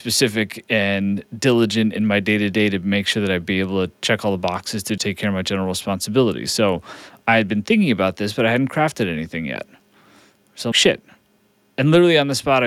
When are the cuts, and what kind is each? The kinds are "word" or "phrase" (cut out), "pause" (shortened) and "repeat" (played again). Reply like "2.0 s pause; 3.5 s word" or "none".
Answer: 5.0 s word; 10.7 s word